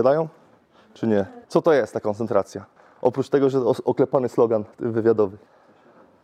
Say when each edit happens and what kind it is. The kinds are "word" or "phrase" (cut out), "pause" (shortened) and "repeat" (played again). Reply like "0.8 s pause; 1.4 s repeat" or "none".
1.4 s pause; 2.8 s pause; 4.7 s pause